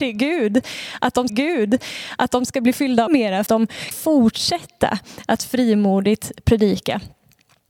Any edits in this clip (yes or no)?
yes